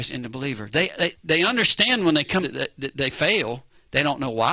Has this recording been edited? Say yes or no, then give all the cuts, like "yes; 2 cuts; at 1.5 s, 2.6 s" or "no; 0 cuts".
yes; 2 cuts; at 1.1 s, 2.4 s